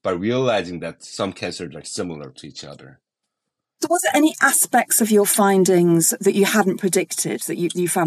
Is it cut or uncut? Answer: uncut